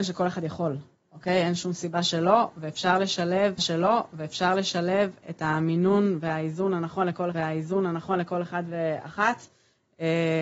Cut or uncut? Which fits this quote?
cut